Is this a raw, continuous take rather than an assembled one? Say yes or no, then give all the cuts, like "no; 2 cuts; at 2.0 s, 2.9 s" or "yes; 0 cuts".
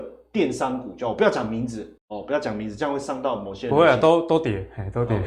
no; 1 cut; at 2.0 s